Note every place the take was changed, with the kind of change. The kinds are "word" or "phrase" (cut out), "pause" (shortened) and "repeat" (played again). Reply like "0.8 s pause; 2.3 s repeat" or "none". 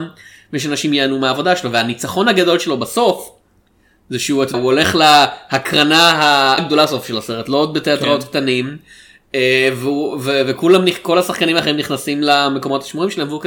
4.5 s word; 6.6 s word